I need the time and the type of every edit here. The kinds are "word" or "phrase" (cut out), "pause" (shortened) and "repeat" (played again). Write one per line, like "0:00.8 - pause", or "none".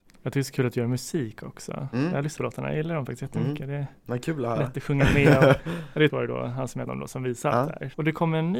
0:02.4 - word
0:06.1 - word
0:06.9 - phrase

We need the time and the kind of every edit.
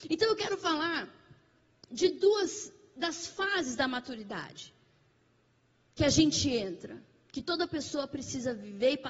none

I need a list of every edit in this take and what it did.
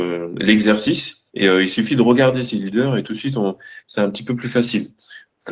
0:01.3 - pause

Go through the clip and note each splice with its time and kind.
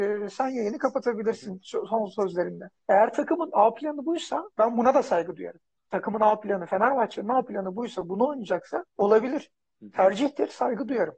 0:02.8 - pause
0:05.8 - pause
0:08.9 - pause

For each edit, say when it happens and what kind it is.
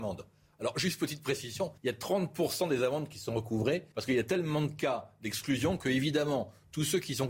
0:01.8 - pause
0:03.9 - pause

